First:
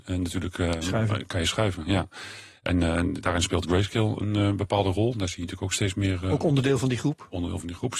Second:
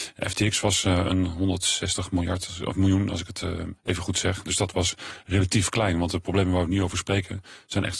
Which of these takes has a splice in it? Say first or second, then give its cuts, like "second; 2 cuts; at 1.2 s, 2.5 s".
second; 1 cut; at 3.8 s